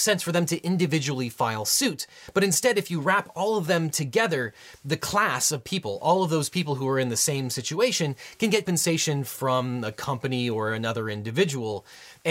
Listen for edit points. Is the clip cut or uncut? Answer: cut